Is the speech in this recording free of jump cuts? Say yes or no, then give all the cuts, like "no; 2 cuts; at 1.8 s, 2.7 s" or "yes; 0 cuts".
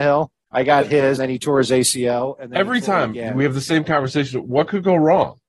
no; 1 cut; at 1.2 s